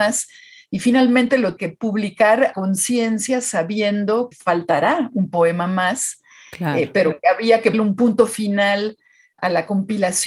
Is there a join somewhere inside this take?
yes; 4 cuts; at 1.6 s, 2.5 s, 4.3 s, 7.7 s

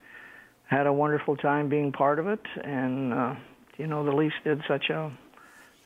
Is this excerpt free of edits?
yes; 0 cuts

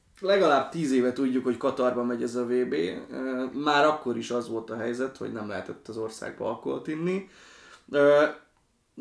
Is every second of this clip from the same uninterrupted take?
yes; 0 cuts

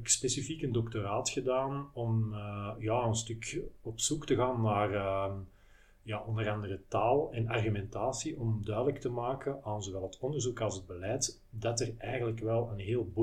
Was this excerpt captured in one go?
yes; 0 cuts

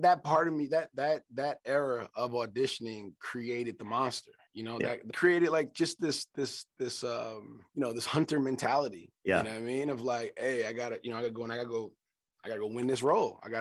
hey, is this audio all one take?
no; 1 cut; at 7.7 s

